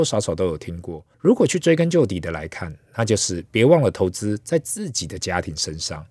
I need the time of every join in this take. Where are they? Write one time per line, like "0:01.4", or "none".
0:01.1